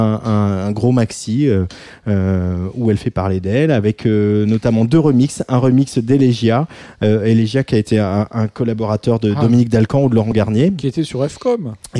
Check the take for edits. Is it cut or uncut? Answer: uncut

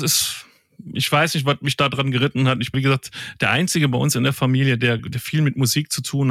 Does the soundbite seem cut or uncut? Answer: cut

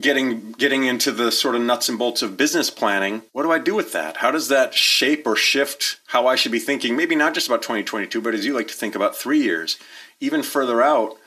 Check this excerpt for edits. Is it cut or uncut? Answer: cut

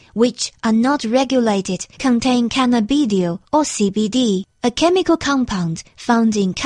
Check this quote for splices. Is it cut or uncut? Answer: cut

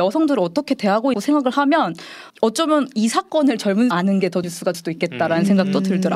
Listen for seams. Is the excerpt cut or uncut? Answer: cut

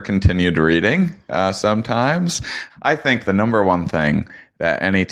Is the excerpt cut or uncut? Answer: cut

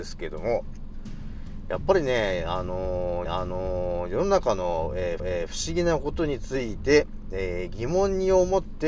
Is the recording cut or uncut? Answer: cut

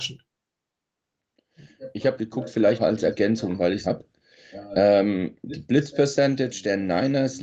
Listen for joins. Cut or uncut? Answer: cut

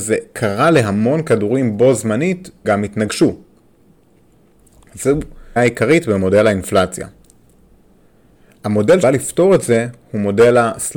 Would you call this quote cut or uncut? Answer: cut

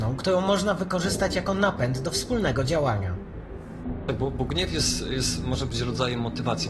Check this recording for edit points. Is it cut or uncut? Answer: uncut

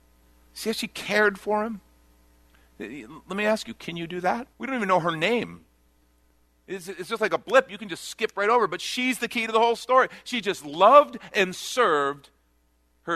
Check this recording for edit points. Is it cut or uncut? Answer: cut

